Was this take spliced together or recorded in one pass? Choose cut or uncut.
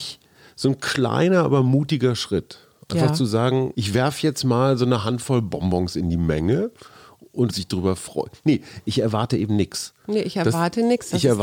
cut